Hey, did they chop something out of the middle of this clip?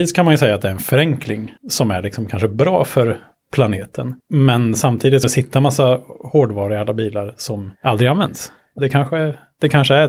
yes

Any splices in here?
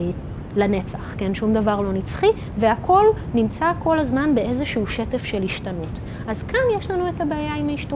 no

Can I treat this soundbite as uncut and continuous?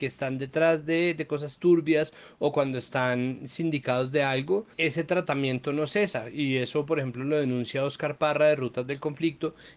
no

